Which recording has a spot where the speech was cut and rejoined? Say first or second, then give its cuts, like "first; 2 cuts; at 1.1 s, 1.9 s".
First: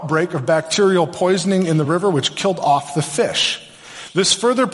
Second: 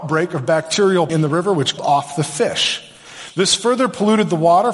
second; 2 cuts; at 1.1 s, 1.8 s